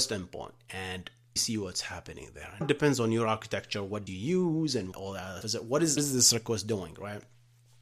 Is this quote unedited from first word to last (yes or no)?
no